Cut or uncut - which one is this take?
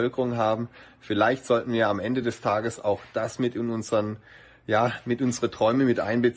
uncut